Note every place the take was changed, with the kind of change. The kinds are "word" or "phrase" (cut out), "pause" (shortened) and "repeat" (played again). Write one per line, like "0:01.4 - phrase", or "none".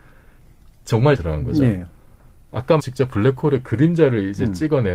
0:01.2 - phrase
0:02.8 - word